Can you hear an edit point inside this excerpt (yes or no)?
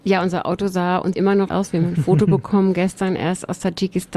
yes